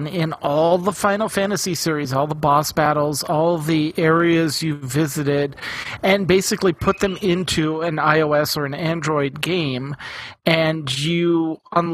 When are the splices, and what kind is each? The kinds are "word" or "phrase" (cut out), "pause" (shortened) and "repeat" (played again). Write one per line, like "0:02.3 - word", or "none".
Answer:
none